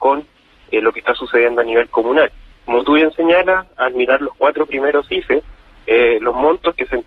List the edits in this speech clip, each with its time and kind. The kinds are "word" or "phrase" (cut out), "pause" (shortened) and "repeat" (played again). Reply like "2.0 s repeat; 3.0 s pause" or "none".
none